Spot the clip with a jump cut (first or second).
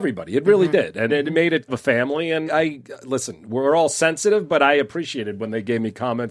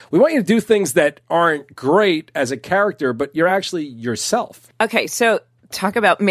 first